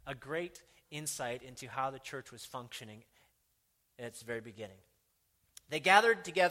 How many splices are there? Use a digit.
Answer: 0